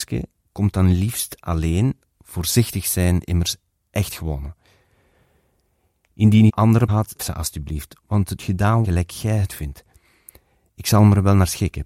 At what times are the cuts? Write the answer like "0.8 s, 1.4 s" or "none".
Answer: 3.2 s, 6.5 s, 6.9 s, 7.2 s, 8.4 s, 8.8 s, 9.5 s